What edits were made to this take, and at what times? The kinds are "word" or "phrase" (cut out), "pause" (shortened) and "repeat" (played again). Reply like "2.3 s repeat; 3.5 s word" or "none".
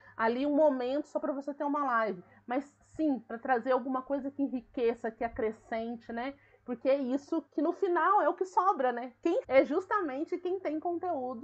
7.5 s word; 9.4 s word